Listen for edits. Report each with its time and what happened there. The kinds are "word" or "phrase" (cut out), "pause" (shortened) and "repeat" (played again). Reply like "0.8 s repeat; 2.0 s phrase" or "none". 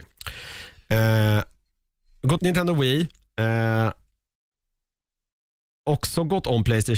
2.4 s word